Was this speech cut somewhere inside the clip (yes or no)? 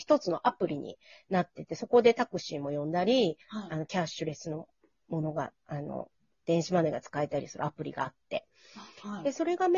no